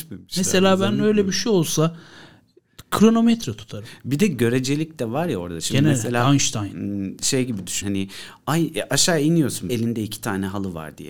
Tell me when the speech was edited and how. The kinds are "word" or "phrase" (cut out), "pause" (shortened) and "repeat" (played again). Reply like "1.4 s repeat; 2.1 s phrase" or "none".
7.8 s word; 9.7 s word

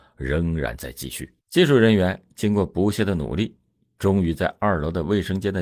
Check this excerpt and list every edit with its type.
1.4 s pause

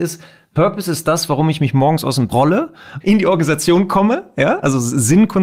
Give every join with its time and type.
2.3 s word; 3.0 s word

